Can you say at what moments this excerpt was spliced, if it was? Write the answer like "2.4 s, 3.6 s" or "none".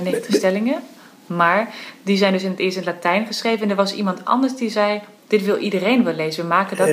none